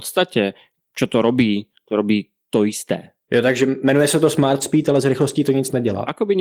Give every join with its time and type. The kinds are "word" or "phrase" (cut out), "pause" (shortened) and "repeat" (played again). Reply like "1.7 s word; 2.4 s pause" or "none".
none